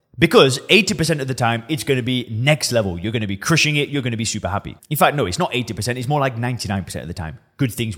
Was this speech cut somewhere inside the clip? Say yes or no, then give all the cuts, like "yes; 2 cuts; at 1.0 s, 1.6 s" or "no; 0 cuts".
no; 0 cuts